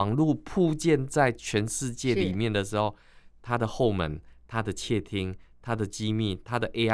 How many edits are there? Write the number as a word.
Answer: zero